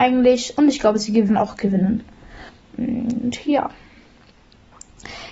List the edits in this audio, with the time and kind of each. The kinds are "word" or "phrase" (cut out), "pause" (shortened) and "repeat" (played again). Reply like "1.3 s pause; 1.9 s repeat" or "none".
1.3 s word; 2.5 s pause

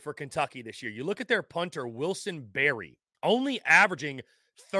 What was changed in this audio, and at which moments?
3.1 s pause

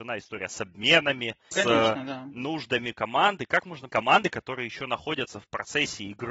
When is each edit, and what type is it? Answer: 1.5 s word; 3.9 s phrase

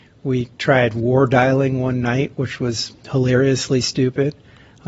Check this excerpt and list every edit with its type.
none

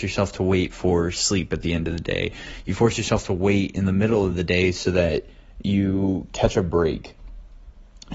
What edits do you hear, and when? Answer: none

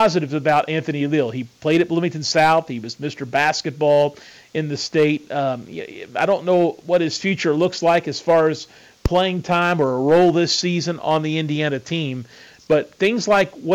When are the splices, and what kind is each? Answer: none

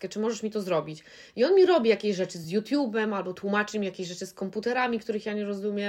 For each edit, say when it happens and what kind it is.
none

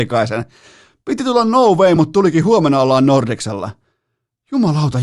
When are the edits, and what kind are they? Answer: none

